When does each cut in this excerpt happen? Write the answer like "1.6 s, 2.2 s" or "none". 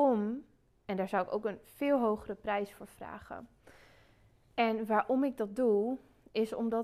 none

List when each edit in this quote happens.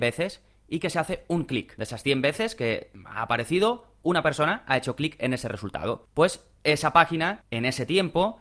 none

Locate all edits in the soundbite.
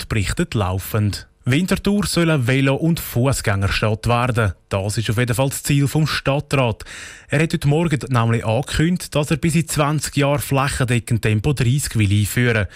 1.4 s

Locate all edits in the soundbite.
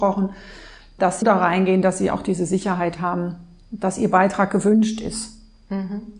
1.2 s

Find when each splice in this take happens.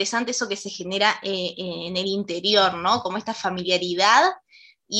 none

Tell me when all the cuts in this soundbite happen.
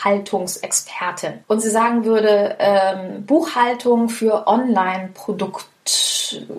1.4 s

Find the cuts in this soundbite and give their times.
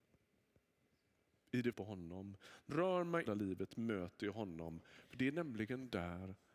1.7 s, 2.7 s, 3.3 s

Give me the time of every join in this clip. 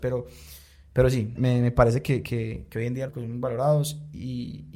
1.4 s, 3.1 s

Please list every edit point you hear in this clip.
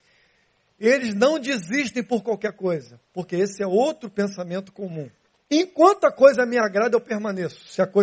5.3 s

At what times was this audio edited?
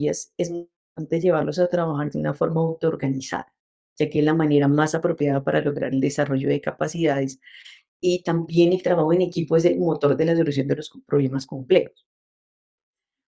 none

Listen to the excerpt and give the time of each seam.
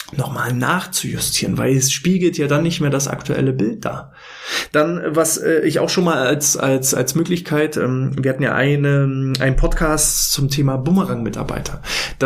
none

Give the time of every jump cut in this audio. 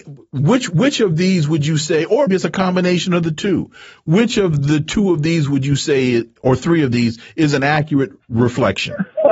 2.3 s

